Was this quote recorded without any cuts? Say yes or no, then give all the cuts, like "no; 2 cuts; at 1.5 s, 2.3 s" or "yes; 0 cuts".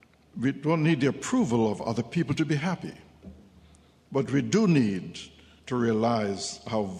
yes; 0 cuts